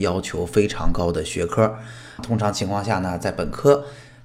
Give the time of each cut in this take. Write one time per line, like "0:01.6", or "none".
0:02.2